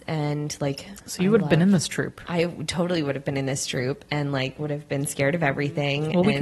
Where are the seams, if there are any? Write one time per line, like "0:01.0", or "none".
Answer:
none